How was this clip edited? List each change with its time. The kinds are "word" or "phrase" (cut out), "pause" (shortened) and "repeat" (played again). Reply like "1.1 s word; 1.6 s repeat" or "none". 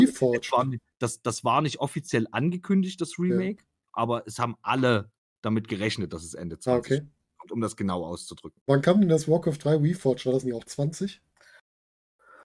none

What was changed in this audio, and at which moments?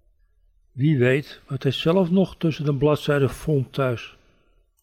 none

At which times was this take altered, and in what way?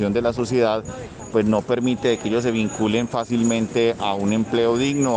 none

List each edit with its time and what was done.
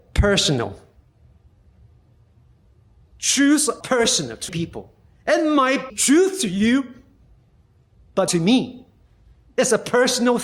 3.8 s word; 4.5 s word; 5.9 s word; 8.3 s word

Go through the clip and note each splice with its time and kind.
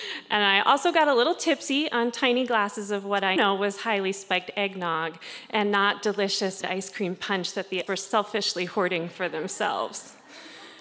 3.4 s word; 6.6 s word; 7.9 s word

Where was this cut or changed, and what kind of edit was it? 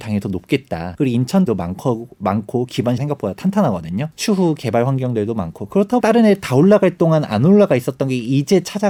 1.5 s phrase; 3.0 s word; 6.0 s phrase

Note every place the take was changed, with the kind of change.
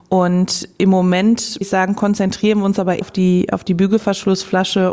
1.6 s word; 3.0 s word

